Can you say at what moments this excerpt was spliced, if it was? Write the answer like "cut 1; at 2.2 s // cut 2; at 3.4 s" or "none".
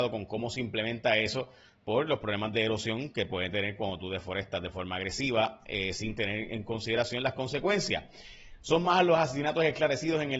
none